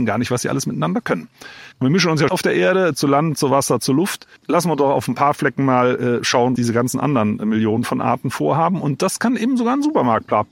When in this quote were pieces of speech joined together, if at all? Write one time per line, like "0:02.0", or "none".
0:01.7
0:02.3
0:04.4
0:06.6